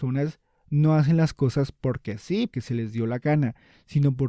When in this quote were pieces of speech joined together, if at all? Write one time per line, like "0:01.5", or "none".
0:02.5